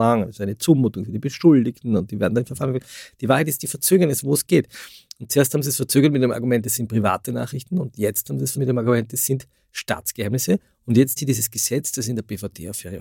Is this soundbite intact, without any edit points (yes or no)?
no